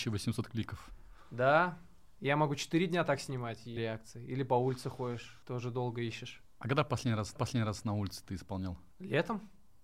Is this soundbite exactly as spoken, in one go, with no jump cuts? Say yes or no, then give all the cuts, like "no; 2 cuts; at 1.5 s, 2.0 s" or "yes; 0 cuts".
no; 4 cuts; at 3.8 s, 5.4 s, 7.4 s, 8.9 s